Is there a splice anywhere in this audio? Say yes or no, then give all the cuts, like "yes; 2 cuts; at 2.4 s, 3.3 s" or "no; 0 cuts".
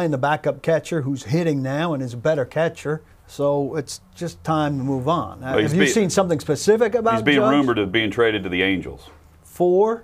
yes; 1 cut; at 3.1 s